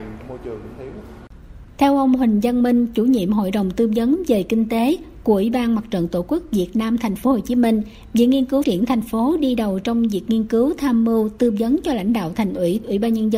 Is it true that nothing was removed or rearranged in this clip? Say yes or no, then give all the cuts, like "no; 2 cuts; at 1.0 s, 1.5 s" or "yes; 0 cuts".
no; 1 cut; at 8.6 s